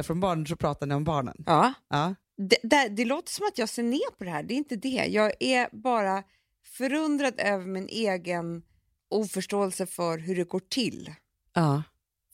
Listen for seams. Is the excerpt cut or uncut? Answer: uncut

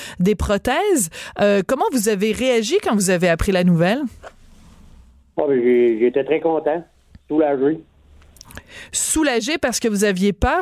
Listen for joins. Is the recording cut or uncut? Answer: uncut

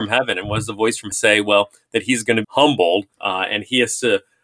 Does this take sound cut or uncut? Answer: cut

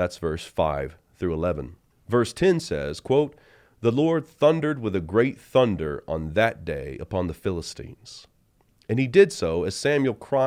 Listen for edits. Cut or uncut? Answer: uncut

